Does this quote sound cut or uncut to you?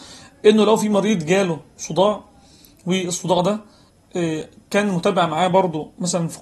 uncut